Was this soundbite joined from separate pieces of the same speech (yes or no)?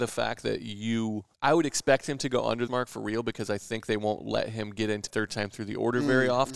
yes